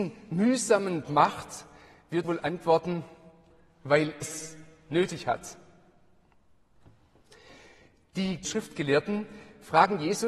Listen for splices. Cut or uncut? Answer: cut